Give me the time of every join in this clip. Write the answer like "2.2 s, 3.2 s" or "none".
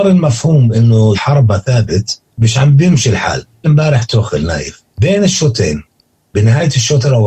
1.1 s, 2.3 s, 3.6 s, 4.9 s